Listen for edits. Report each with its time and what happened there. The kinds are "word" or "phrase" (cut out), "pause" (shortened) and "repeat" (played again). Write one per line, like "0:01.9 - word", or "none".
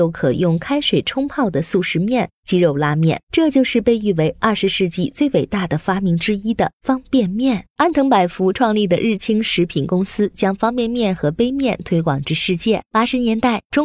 0:03.2 - pause